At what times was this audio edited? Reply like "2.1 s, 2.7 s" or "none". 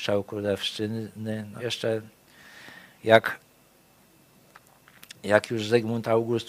1.6 s